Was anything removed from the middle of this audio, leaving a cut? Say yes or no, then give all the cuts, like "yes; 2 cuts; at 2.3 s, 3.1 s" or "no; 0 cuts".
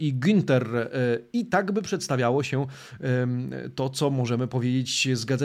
no; 0 cuts